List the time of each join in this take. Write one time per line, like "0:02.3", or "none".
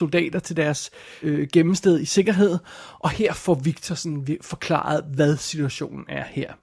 0:01.2